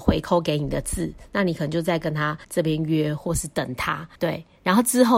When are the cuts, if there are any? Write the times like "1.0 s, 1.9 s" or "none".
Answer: 2.4 s, 4.2 s